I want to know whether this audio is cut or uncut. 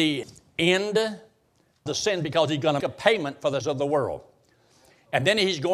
cut